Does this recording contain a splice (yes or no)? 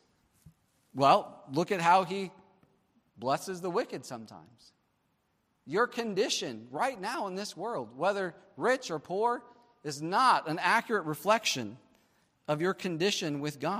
no